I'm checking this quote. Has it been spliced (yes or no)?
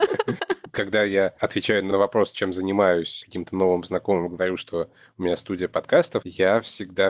no